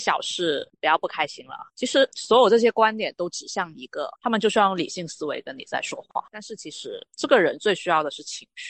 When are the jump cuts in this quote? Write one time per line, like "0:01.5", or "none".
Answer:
0:04.1

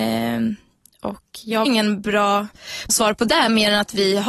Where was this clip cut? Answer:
0:01.7
0:02.9

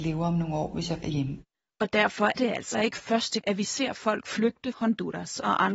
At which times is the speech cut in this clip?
0:01.0
0:02.4
0:02.7
0:03.4
0:04.7

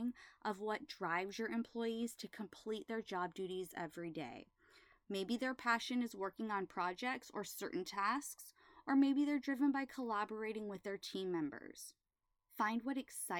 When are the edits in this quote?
none

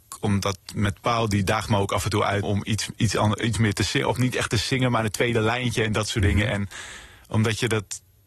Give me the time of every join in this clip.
0:02.4

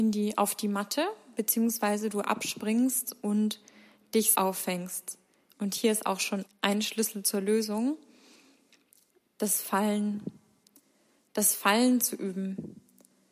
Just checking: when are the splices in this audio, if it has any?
0:04.3
0:06.5

